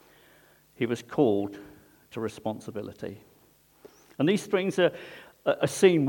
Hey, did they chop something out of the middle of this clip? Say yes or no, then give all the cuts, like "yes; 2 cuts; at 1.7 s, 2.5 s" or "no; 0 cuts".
no; 0 cuts